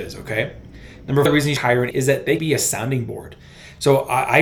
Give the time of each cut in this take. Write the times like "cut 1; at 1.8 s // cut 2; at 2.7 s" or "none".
cut 1; at 1.3 s // cut 2; at 1.6 s // cut 3; at 1.9 s // cut 4; at 2.4 s